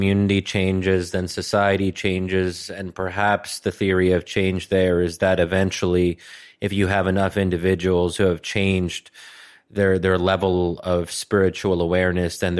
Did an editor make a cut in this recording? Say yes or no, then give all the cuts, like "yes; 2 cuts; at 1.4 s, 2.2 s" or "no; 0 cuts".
no; 0 cuts